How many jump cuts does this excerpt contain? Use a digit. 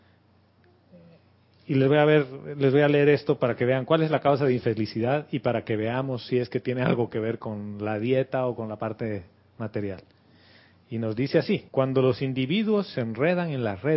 1